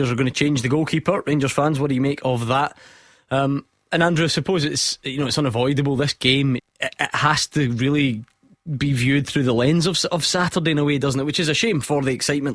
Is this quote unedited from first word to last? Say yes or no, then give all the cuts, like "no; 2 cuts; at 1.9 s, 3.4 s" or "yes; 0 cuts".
no; 1 cut; at 6.6 s